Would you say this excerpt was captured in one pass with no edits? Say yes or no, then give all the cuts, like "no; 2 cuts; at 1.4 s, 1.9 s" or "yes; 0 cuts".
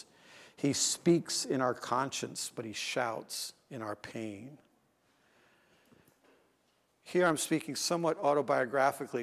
yes; 0 cuts